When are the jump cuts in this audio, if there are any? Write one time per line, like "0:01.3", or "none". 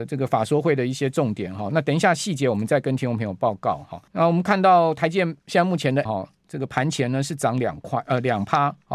0:04.1
0:05.4
0:06.1